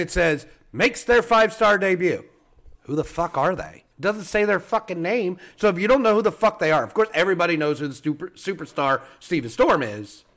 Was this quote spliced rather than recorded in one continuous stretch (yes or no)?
yes